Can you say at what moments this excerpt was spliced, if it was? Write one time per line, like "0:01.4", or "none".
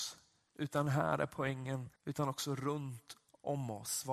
0:02.0

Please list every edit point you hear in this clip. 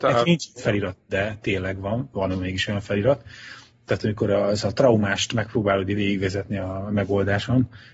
none

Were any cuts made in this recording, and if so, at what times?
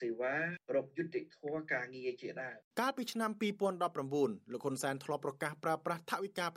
0:02.7

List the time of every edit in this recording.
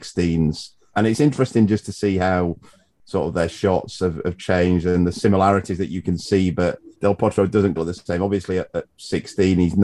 0:00.9
0:06.9
0:07.8

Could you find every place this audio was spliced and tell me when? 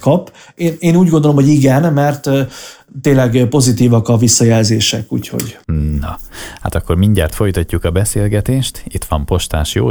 none

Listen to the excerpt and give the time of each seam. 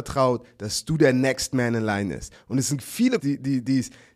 0:03.2

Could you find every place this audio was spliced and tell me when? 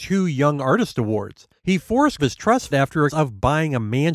0:01.6
0:02.2
0:02.7
0:03.1

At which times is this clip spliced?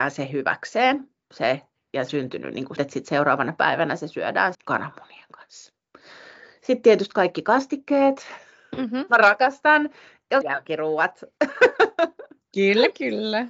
0:02.1
0:02.8
0:04.5
0:10.4

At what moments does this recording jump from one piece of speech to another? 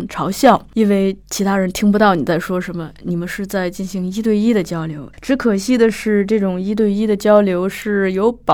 0:01.2
0:05.1

